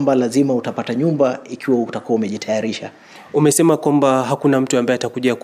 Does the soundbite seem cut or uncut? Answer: uncut